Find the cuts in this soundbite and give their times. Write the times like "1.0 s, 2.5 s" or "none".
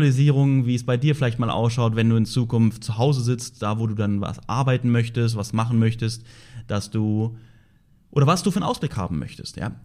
none